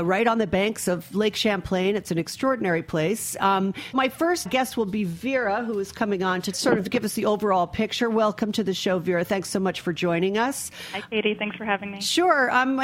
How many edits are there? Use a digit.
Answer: 3